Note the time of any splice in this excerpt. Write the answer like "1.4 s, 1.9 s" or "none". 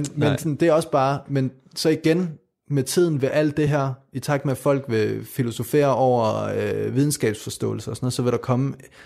none